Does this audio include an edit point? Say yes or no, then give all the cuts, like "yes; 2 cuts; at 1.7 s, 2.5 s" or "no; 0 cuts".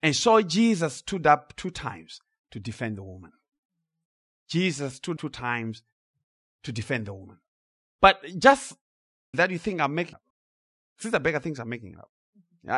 yes; 3 cuts; at 5.2 s, 9.3 s, 10.1 s